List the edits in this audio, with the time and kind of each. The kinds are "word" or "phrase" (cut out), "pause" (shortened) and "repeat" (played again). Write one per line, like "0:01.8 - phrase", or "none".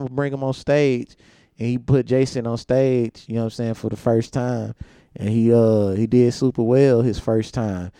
none